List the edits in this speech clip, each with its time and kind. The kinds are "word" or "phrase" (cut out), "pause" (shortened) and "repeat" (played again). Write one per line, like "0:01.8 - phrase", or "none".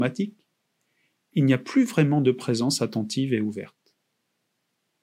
none

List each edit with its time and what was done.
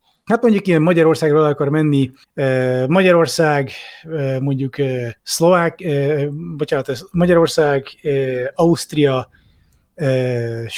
0:02.2 - pause
0:05.2 - pause

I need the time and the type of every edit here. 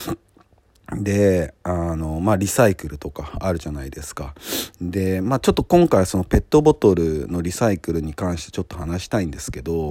none

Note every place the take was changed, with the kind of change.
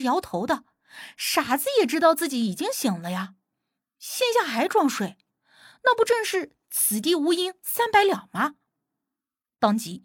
none

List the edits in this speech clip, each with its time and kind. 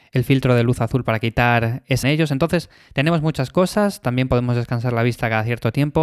0:02.0 - phrase

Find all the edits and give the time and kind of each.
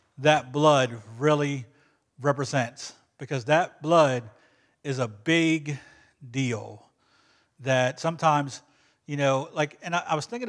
none

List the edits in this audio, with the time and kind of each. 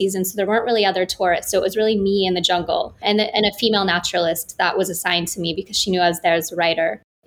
none

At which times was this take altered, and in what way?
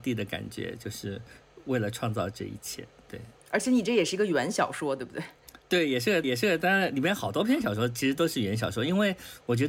0:03.4 - pause
0:06.2 - repeat

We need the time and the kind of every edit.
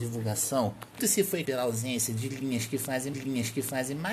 0:01.0 - word
0:01.4 - word
0:03.1 - repeat

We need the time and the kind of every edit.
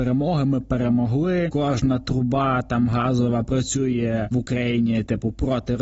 none

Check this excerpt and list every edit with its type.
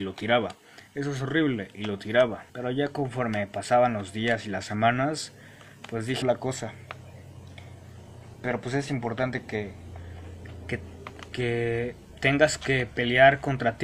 0:02.5 - pause
0:06.2 - phrase

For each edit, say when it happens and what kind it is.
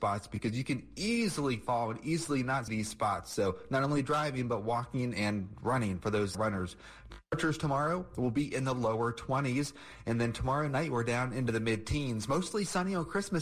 0:02.7 - word
0:06.3 - word

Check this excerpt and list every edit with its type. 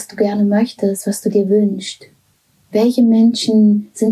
none

